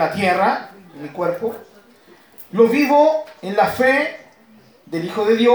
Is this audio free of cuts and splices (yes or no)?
yes